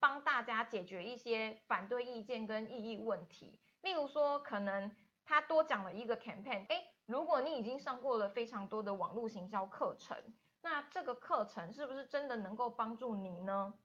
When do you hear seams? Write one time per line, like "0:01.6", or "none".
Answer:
0:06.7